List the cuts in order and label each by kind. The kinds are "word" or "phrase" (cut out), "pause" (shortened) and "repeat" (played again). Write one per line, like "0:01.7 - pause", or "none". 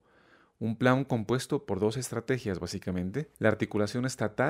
0:03.3 - pause